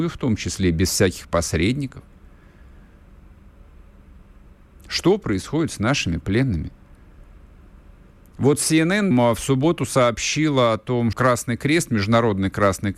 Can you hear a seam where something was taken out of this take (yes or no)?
yes